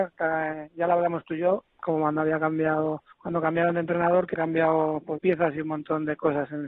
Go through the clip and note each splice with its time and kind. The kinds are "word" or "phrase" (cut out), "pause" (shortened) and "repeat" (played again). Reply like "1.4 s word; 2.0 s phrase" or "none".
3.1 s pause; 4.3 s word; 5.2 s word

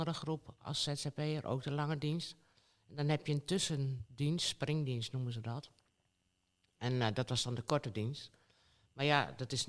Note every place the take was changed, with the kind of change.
none

